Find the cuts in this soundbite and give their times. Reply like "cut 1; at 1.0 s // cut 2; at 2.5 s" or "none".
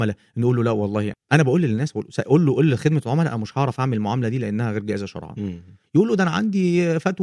cut 1; at 1.1 s